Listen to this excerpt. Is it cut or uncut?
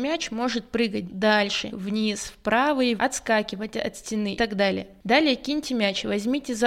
cut